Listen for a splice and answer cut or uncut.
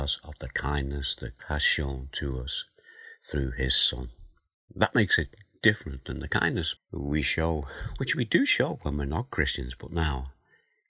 cut